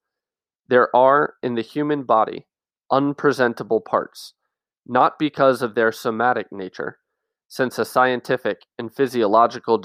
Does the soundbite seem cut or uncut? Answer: uncut